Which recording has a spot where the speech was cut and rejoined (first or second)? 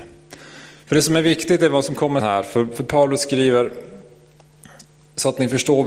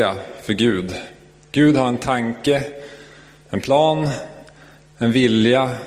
first